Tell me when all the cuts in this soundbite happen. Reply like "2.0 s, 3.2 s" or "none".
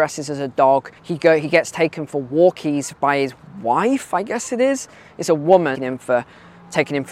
1.0 s, 5.7 s